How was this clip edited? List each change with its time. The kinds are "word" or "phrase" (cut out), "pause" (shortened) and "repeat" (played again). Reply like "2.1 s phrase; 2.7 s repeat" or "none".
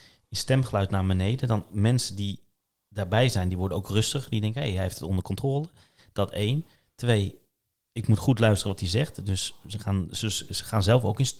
none

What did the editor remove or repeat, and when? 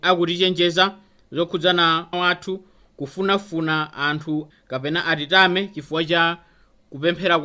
2.1 s phrase; 4.5 s word

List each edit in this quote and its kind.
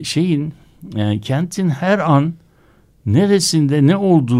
none

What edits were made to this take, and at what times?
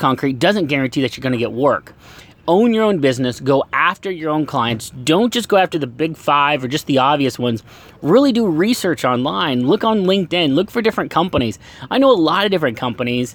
none

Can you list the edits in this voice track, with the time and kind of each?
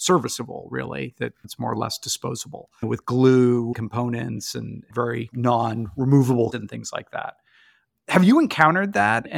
3.7 s phrase; 6.5 s word

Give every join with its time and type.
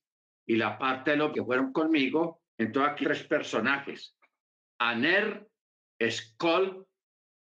1.3 s word; 2.5 s pause; 3.0 s word

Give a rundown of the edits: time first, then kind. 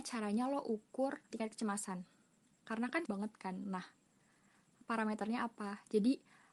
1.3 s word; 3.1 s word

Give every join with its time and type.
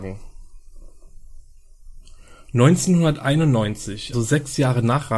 4.1 s word

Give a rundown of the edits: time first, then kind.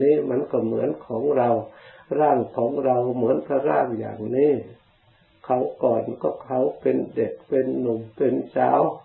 none

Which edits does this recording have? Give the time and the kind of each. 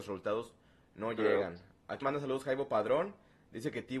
2.0 s word

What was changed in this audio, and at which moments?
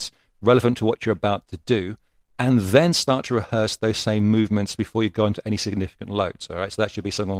none

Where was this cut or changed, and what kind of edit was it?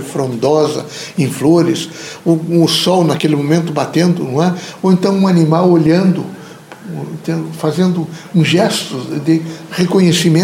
none

